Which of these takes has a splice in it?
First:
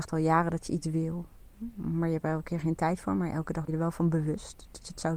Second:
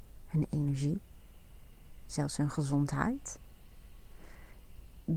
first; 1 cut; at 3.7 s

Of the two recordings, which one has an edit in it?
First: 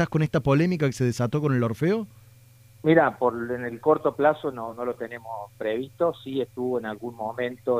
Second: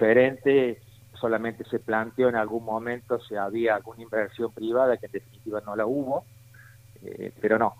second; 1 cut; at 1.1 s

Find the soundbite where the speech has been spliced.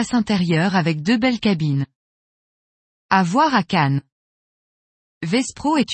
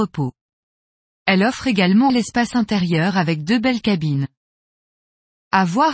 second; 1 cut; at 2.1 s

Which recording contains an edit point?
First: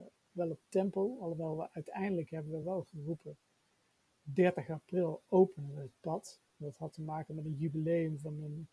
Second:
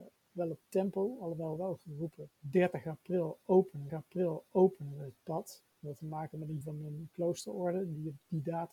second; 5 cuts; at 1.6 s, 2.3 s, 3.9 s, 6.0 s, 6.6 s

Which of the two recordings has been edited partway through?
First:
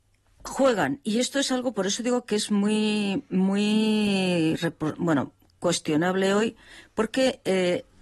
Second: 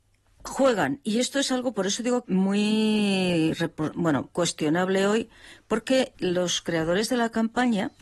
second; 3 cuts; at 2.2 s, 4.3 s, 6.1 s

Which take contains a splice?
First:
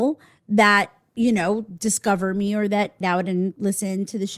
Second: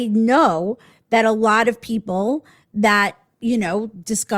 first; 1 cut; at 3.0 s

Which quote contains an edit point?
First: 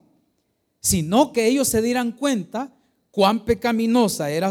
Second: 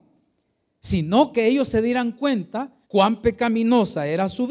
second; 1 cut; at 2.8 s

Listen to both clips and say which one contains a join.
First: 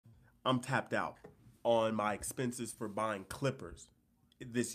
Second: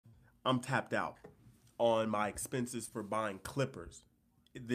first; 1 cut; at 1.6 s

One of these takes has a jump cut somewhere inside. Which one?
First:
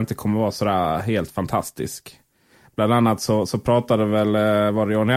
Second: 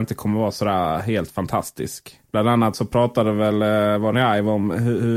second; 3 cuts; at 2.2 s, 2.7 s, 4.1 s

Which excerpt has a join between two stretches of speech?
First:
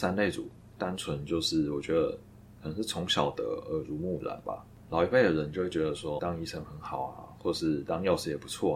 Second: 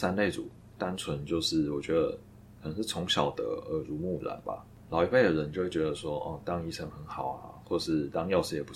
first; 1 cut; at 6.2 s

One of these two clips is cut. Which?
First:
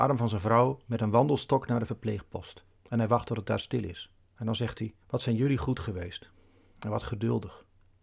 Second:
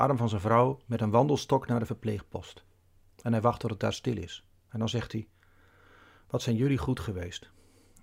first; 2 cuts; at 2.8 s, 5.0 s

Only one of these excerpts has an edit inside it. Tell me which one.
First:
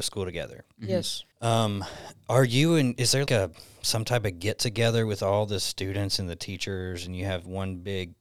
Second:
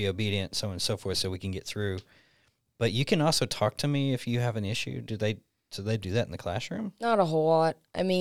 first; 2 cuts; at 1.3 s, 3.3 s

